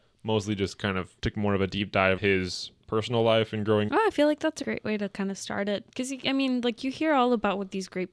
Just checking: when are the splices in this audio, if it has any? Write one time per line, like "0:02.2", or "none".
0:01.2
0:02.2
0:03.9
0:04.6